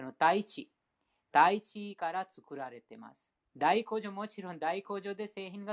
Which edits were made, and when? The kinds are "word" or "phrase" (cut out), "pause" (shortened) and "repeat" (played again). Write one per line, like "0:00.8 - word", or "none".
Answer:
0:03.4 - pause